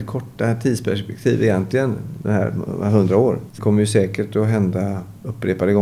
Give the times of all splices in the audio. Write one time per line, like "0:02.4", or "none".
0:03.6